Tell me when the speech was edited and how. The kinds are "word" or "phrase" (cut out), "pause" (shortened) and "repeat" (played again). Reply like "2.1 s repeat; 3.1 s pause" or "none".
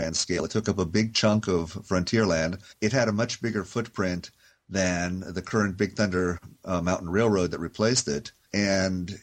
none